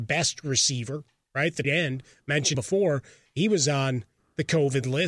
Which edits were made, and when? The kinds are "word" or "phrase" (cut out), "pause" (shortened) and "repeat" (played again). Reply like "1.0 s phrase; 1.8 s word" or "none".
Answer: 1.6 s word; 2.5 s word